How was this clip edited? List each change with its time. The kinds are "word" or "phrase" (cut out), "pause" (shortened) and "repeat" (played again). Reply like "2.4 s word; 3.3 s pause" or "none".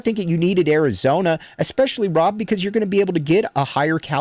none